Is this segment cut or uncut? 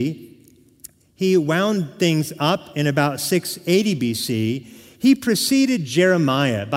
uncut